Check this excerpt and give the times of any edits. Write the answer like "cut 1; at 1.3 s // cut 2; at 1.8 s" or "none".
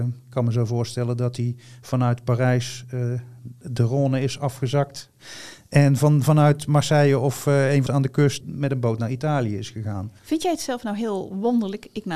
cut 1; at 7.9 s // cut 2; at 8.4 s // cut 3; at 10.2 s